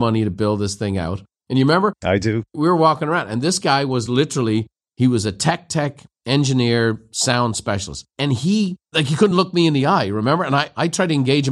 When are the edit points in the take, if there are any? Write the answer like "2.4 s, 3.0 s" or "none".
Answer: none

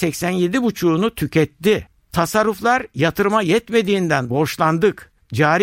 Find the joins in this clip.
4.3 s

